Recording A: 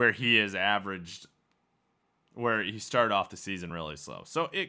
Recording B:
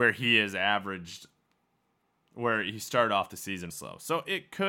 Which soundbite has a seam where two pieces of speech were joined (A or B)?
B